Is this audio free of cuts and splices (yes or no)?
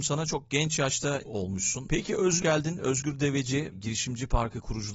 no